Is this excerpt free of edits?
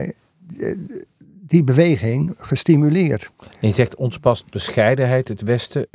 no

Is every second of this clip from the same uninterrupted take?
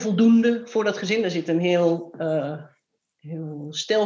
yes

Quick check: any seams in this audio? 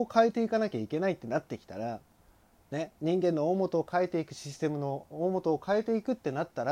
no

